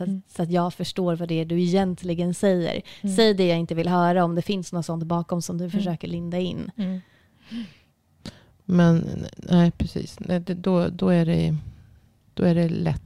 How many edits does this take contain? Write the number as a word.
zero